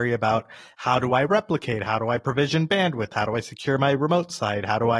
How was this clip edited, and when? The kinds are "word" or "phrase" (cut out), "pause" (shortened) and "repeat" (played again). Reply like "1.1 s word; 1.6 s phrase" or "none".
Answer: none